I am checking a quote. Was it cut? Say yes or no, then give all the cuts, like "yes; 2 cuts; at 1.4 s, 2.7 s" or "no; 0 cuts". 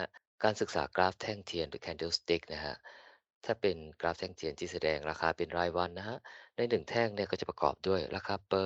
no; 0 cuts